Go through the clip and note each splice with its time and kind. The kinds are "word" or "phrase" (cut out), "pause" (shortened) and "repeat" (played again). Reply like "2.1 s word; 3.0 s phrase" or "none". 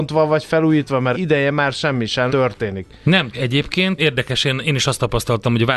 1.1 s word; 2.3 s word; 3.3 s word; 4.0 s word